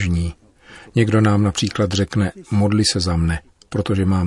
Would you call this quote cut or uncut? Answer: uncut